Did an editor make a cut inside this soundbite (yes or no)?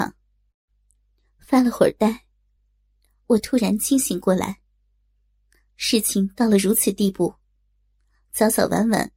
no